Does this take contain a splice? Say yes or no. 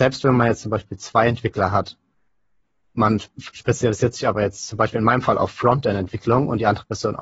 no